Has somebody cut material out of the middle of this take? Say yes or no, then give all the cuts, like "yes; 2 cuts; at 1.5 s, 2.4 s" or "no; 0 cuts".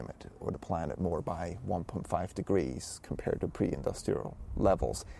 no; 0 cuts